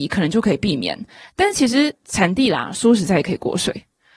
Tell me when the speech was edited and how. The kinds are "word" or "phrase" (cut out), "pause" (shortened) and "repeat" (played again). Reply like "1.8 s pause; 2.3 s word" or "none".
none